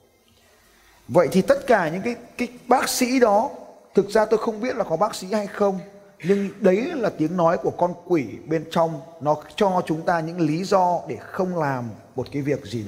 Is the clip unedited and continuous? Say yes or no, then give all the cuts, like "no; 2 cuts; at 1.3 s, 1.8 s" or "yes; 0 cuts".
yes; 0 cuts